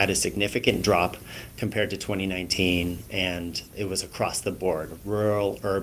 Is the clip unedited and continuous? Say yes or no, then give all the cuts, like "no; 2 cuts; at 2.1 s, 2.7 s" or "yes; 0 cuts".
yes; 0 cuts